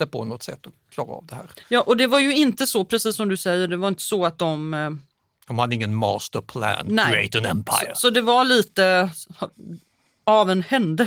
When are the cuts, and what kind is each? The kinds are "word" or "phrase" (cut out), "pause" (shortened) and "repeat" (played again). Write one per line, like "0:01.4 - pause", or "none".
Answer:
none